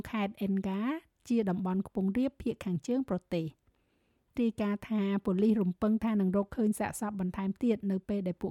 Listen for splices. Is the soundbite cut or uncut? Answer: cut